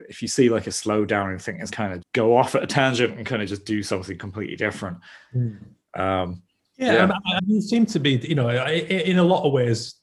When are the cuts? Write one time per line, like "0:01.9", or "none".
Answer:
0:01.4
0:01.7
0:02.0
0:06.6
0:07.4